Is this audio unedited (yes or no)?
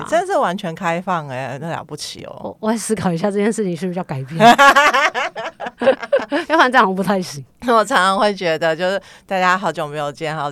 yes